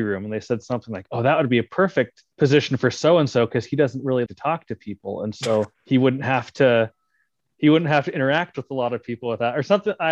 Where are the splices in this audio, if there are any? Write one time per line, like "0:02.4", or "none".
0:02.3
0:04.3
0:05.7